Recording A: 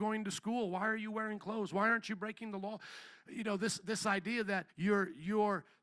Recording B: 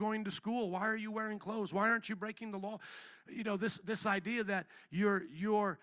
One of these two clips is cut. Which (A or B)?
A